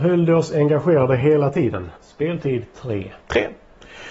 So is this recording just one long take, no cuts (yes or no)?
no